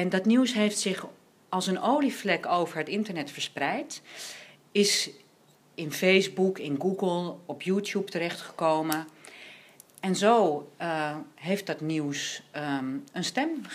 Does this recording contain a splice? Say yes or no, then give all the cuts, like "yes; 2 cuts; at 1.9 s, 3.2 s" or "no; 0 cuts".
no; 0 cuts